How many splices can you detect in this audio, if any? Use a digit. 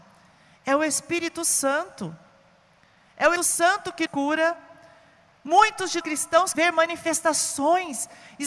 4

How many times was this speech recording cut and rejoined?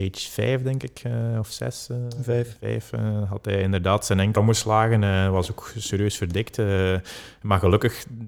1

